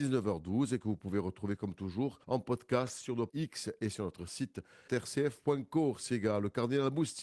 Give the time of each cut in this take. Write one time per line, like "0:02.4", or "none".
0:02.2
0:03.3
0:04.9